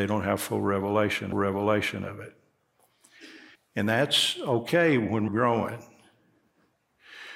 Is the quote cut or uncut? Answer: cut